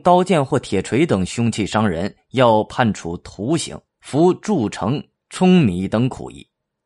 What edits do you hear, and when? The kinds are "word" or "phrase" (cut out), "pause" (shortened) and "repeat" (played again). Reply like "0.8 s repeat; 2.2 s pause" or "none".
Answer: 3.9 s pause